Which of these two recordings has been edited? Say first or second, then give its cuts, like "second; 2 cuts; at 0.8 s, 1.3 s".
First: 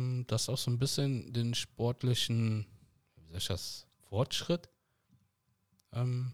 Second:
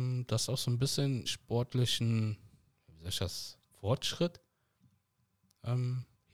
second; 1 cut; at 1.3 s